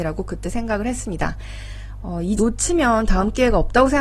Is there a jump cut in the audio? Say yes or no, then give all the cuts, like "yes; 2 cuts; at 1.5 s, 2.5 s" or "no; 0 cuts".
yes; 1 cut; at 2.4 s